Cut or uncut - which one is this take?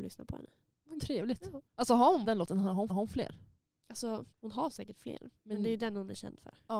cut